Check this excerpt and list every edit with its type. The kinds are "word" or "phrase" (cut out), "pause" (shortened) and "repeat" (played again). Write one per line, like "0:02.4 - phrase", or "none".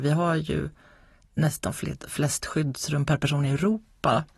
none